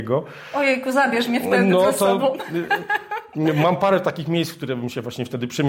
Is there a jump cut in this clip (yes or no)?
no